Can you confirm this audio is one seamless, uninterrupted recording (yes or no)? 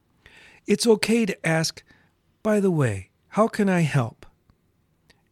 yes